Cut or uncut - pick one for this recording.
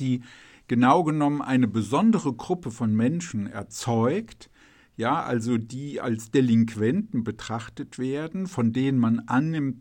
uncut